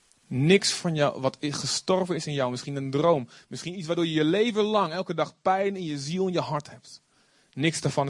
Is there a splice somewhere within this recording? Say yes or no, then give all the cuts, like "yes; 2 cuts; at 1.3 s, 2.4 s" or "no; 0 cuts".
no; 0 cuts